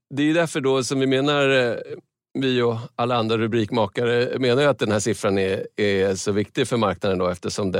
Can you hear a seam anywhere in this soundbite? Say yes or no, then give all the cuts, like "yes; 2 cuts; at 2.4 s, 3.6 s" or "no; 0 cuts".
no; 0 cuts